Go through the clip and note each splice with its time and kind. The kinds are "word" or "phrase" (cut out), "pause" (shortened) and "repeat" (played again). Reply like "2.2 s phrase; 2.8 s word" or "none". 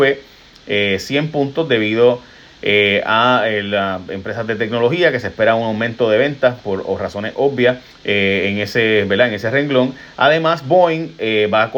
7.9 s pause